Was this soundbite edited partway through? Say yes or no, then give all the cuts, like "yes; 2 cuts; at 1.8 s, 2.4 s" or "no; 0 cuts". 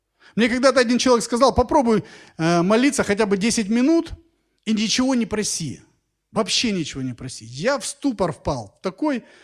no; 0 cuts